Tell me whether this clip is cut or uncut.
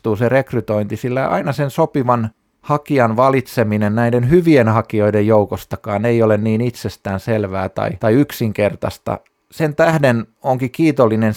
uncut